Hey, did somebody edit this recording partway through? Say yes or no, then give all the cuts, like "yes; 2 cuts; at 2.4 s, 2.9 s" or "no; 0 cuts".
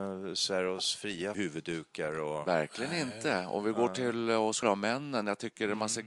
yes; 2 cuts; at 1.3 s, 4.6 s